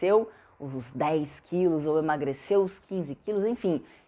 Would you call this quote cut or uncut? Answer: uncut